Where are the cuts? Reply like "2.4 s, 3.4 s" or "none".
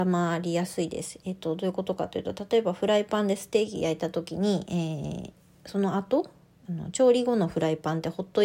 none